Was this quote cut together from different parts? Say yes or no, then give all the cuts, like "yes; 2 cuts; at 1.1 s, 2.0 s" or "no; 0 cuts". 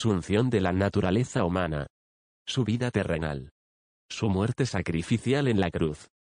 no; 0 cuts